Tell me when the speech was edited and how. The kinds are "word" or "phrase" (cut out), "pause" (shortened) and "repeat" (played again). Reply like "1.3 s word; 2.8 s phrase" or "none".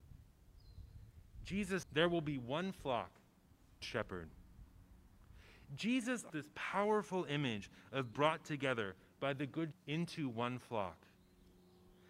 1.8 s word; 3.8 s word; 6.3 s word; 8.1 s word; 9.7 s word